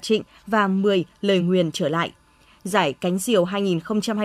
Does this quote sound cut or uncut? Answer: uncut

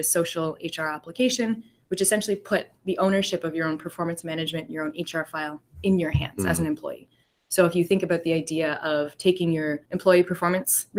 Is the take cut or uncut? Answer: cut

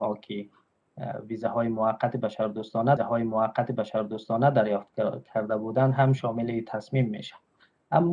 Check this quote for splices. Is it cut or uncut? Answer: cut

